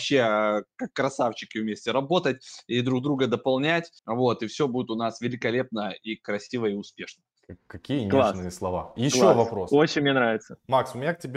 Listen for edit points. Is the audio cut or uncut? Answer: cut